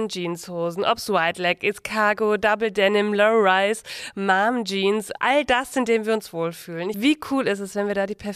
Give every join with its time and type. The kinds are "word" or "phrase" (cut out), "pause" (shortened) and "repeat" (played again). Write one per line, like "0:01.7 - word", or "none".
none